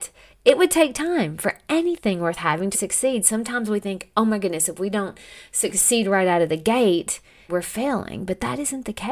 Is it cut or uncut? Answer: cut